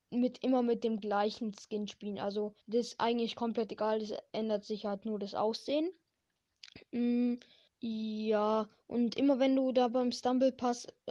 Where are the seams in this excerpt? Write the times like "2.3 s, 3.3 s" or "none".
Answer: 2.6 s, 7.7 s